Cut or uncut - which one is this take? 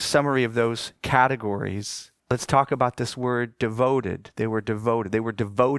cut